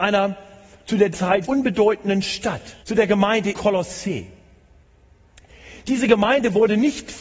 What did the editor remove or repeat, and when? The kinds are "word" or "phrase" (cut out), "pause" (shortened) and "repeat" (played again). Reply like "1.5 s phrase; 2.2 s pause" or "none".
1.1 s word; 1.4 s word; 2.8 s pause; 3.5 s word